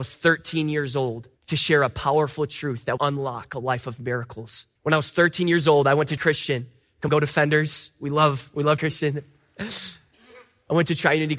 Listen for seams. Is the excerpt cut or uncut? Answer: cut